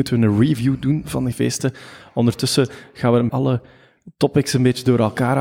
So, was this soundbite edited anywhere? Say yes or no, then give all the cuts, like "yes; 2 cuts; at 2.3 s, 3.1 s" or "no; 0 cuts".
yes; 2 cuts; at 1.3 s, 3.3 s